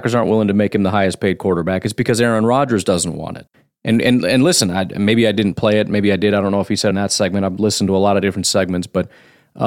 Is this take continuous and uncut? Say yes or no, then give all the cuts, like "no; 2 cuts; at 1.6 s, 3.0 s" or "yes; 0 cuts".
no; 1 cut; at 6.9 s